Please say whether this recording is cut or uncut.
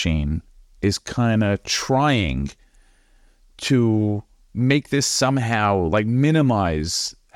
uncut